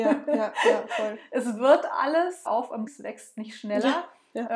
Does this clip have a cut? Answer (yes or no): yes